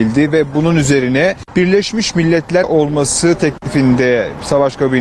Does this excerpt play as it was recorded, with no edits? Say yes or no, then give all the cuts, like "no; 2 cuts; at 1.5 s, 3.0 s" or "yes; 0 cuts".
no; 1 cut; at 2.6 s